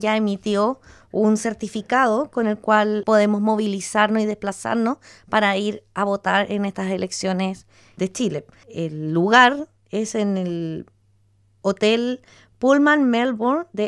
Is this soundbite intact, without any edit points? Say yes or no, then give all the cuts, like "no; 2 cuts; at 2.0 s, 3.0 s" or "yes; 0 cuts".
yes; 0 cuts